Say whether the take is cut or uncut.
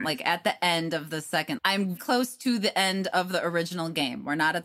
cut